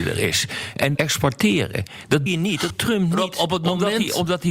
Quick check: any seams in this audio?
yes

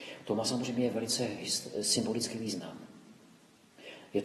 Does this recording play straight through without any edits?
yes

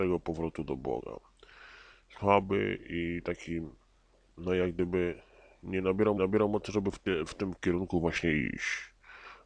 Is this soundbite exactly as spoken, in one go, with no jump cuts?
no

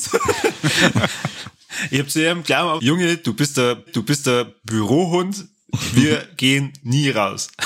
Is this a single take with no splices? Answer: no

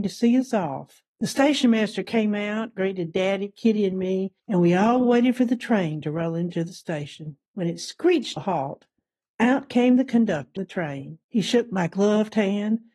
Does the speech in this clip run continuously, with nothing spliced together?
no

